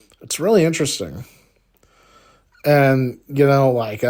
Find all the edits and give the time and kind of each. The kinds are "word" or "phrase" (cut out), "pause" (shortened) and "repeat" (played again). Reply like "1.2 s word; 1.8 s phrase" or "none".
none